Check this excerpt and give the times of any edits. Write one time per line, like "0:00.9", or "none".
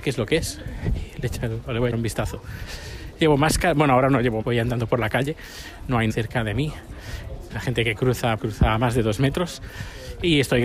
0:01.9
0:04.4
0:06.1
0:07.5
0:08.4